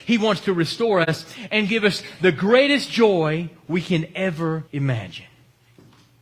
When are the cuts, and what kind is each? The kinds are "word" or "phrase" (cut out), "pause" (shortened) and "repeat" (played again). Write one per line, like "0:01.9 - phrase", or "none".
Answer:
0:04.7 - pause